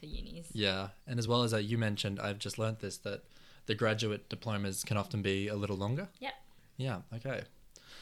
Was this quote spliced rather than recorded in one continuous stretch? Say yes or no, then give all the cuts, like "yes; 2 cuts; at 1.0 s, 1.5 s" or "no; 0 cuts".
no; 0 cuts